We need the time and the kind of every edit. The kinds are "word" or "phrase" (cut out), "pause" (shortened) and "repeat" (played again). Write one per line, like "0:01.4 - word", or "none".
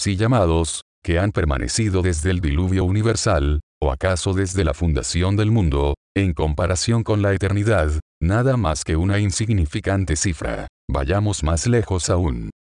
none